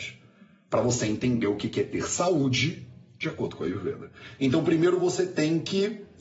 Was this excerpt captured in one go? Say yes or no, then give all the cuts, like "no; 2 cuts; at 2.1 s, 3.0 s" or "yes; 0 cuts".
yes; 0 cuts